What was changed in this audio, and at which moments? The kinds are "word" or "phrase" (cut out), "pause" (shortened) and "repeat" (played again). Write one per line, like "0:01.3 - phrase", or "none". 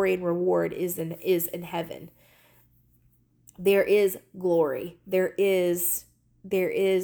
none